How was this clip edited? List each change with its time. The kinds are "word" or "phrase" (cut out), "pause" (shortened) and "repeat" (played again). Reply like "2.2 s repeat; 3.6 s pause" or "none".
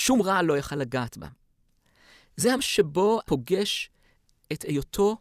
2.6 s word; 3.2 s word